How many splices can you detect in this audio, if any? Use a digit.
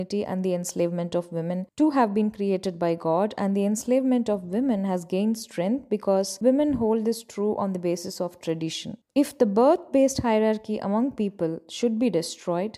1